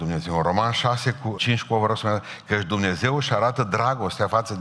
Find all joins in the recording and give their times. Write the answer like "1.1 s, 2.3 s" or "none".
1.4 s